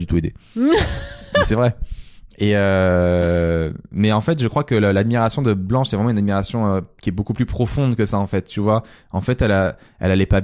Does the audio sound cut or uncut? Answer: uncut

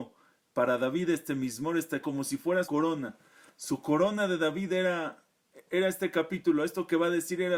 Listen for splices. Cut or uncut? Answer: cut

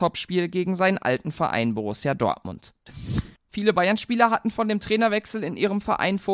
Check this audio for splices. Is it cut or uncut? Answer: uncut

